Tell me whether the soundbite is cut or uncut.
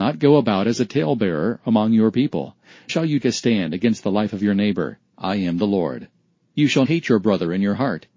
cut